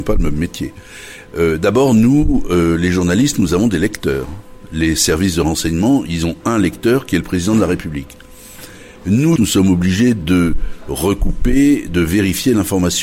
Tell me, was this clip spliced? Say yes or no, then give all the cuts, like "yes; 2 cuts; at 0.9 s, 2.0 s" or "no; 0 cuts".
yes; 1 cut; at 9.4 s